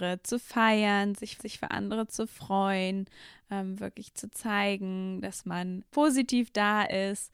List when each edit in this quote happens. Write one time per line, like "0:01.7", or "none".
0:01.4
0:05.9